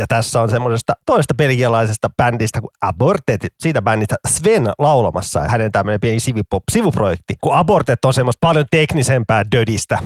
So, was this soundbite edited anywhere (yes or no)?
yes